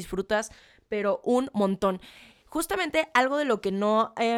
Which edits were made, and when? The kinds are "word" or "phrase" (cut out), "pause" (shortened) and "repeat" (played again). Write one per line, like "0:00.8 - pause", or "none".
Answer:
none

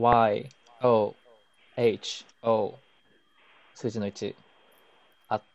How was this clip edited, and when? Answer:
0:01.7 - word
0:02.3 - word

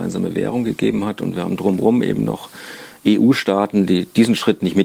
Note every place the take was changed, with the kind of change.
none

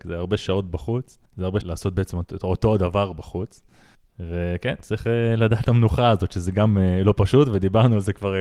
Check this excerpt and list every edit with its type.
0:01.3 - pause
0:01.6 - phrase
0:03.9 - pause
0:05.6 - word

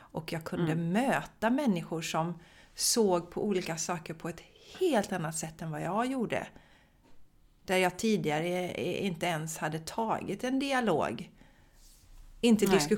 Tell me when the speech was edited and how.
none

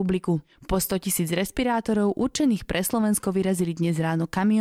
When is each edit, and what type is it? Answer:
none

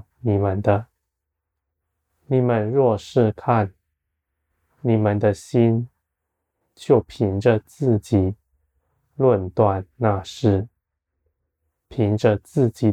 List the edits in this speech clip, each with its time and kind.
none

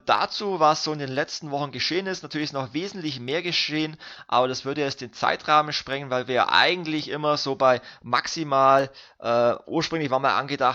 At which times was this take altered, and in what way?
none

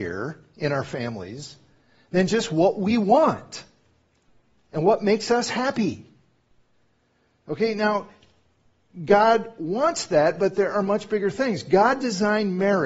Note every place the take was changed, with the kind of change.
none

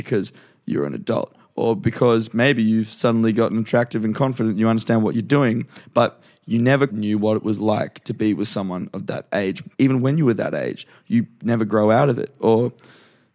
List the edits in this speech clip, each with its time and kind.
0:06.9 - word
0:09.7 - pause

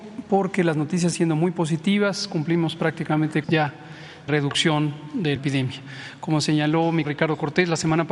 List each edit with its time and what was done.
0:01.1 - word
0:03.4 - phrase
0:04.3 - word
0:05.4 - word
0:07.0 - word

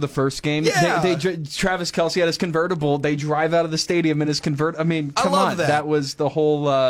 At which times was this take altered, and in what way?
none

